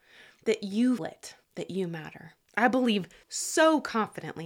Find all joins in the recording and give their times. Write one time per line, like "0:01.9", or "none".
0:01.0
0:01.4
0:02.4
0:03.2